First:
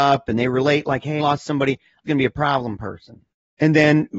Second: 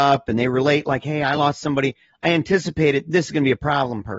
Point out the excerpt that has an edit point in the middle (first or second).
first